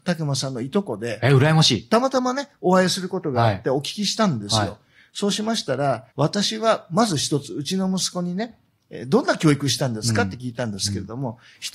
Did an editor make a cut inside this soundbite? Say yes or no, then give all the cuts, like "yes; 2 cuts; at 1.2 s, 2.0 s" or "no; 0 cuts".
yes; 1 cut; at 6.1 s